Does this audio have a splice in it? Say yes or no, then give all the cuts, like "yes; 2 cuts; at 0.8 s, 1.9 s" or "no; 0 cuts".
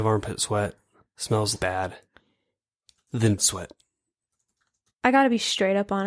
yes; 2 cuts; at 1.6 s, 3.4 s